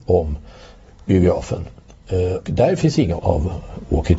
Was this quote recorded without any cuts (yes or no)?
no